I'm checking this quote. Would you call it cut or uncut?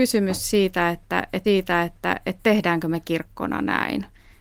cut